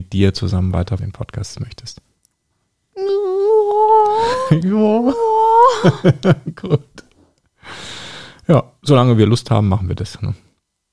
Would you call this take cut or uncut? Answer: cut